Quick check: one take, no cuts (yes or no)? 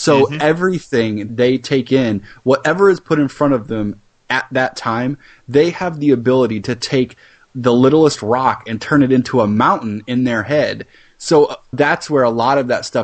no